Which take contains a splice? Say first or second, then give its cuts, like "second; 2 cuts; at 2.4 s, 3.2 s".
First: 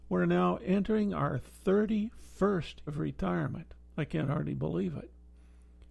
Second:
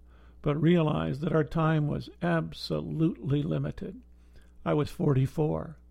first; 1 cut; at 2.9 s